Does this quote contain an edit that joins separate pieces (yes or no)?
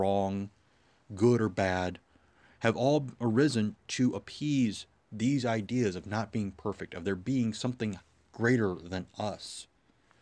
no